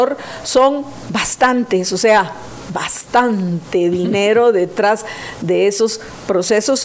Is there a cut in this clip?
no; 0 cuts

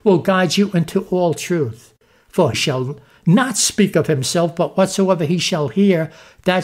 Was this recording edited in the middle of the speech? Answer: yes; 1 cut; at 2.5 s

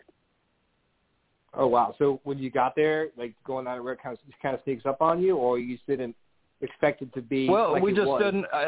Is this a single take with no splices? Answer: yes; 0 cuts

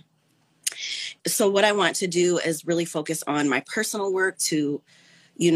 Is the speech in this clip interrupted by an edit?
yes; 2 cuts; at 1.2 s, 4.3 s

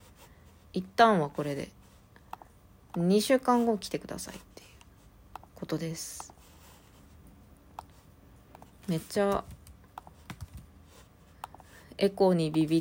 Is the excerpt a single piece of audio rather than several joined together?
no; 1 cut; at 5.5 s

